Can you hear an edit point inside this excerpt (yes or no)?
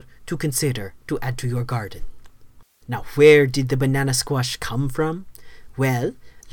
no